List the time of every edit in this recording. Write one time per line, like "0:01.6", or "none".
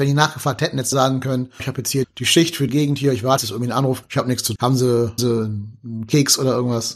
0:00.9
0:01.6
0:02.0
0:02.7
0:03.4
0:04.0
0:04.6
0:05.2

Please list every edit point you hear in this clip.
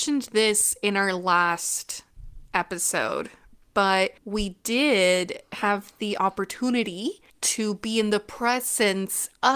0:04.2
0:07.3

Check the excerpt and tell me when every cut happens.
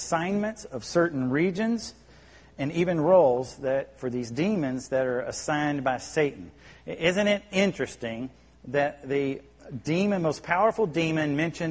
none

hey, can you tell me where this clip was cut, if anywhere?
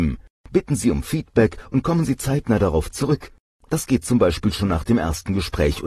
none

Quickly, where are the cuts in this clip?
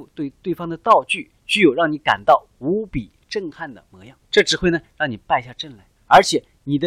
0:01.3
0:04.2
0:06.0

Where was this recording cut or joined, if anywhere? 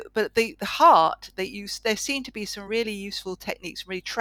none

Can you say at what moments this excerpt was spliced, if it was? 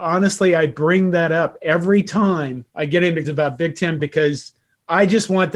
0:02.7
0:03.2
0:04.0

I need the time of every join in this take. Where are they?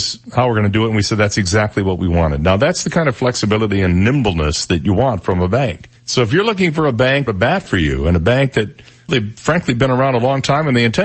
0:06.0
0:07.3
0:09.1

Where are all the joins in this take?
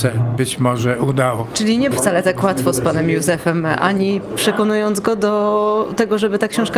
0:01.9

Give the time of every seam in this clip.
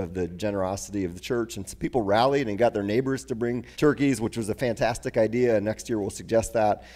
0:03.7

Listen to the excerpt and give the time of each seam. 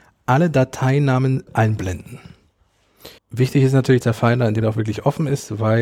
0:01.5
0:03.2
0:04.0
0:04.6

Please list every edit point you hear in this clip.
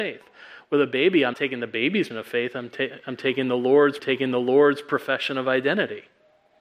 0:01.3
0:02.1
0:04.0

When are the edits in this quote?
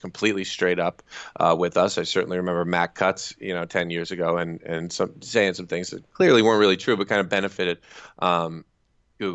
0:06.1

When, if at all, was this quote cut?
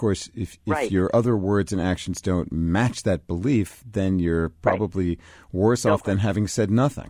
none

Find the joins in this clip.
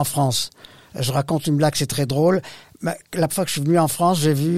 0:03.3

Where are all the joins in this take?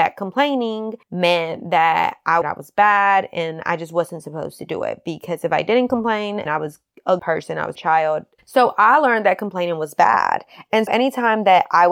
0:01.0
0:02.4
0:06.5
0:07.2
0:07.8
0:10.9

